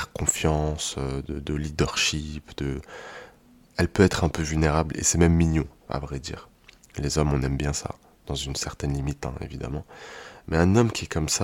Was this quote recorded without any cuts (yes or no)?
yes